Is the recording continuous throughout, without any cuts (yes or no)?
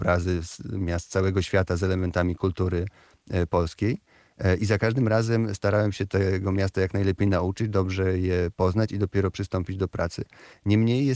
yes